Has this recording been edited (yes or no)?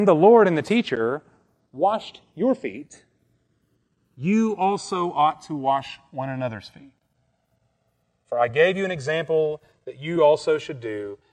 no